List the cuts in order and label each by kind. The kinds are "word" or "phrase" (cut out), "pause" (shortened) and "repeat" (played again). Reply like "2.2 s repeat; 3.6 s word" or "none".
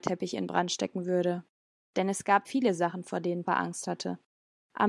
2.4 s word; 3.4 s word